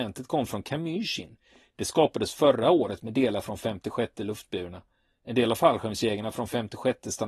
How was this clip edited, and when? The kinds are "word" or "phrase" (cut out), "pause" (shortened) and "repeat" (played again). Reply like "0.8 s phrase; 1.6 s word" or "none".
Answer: none